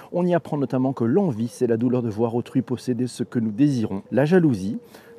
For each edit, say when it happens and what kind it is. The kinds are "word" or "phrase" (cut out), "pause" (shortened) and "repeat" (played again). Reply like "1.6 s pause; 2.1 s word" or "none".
4.1 s pause

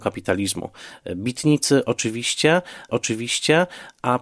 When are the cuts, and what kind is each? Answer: 2.9 s repeat

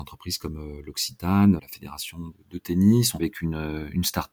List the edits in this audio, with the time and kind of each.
1.6 s word; 2.3 s word; 3.2 s word

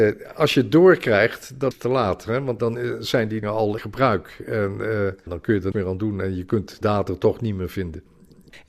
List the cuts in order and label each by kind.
1.7 s word; 2.6 s word; 3.4 s word; 3.8 s word; 5.3 s word; 5.7 s word; 6.8 s word

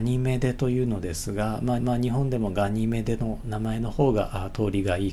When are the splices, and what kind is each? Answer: 1.8 s repeat

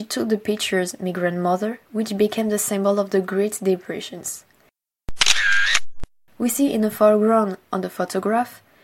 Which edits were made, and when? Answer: none

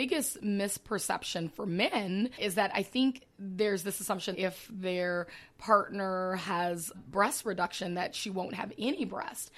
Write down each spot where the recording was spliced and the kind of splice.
4.3 s word; 6.9 s word

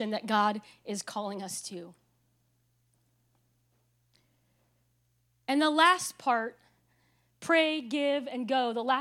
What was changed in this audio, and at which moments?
none

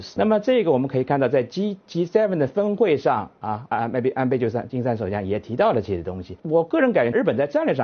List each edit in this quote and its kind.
3.7 s word

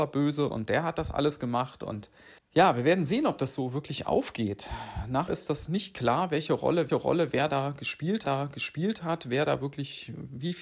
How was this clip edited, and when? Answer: 2.4 s pause; 5.3 s phrase; 6.9 s repeat; 8.2 s repeat

